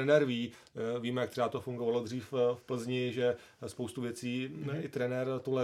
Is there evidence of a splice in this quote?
no; 0 cuts

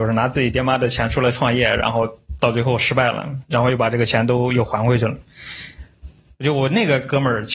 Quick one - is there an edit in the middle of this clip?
no; 0 cuts

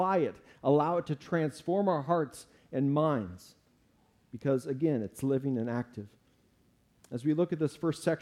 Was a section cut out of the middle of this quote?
no; 0 cuts

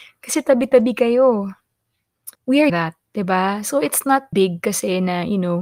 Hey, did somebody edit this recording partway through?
yes; 4 cuts; at 2.3 s, 2.7 s, 3.1 s, 4.3 s

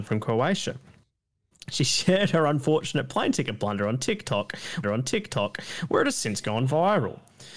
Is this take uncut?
no; 1 cut; at 4.8 s

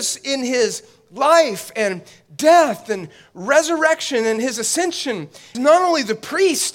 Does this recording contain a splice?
yes; 1 cut; at 5.5 s

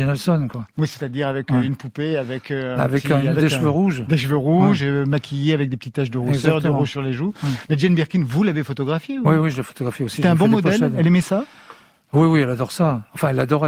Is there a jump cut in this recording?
no; 0 cuts

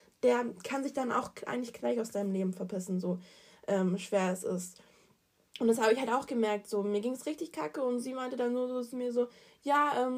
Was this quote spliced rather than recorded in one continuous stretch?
no; 0 cuts

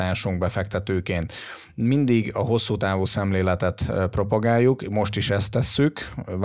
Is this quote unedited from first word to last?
yes; 0 cuts

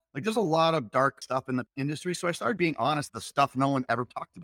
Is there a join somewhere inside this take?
yes; 4 cuts; at 1.2 s, 1.7 s, 2.6 s, 3.1 s

